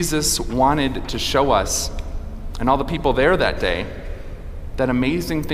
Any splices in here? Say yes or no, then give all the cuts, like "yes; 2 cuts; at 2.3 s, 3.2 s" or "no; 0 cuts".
no; 0 cuts